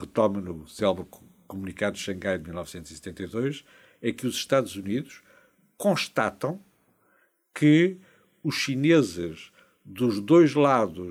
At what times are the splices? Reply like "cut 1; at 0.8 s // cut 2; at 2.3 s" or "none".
none